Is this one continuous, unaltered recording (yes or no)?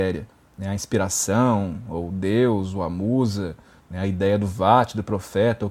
yes